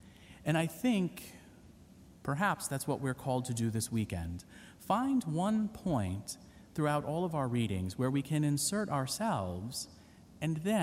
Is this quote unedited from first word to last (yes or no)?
yes